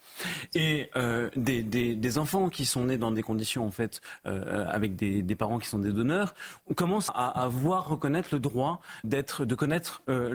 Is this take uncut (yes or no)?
no